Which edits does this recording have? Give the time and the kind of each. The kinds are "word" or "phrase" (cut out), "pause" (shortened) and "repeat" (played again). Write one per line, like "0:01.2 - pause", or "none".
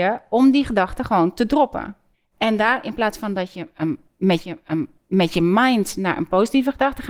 0:02.1 - pause
0:04.4 - repeat